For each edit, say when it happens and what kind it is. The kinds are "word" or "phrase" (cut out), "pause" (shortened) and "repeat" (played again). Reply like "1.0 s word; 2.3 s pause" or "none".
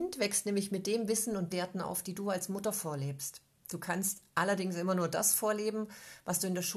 1.5 s word; 3.5 s pause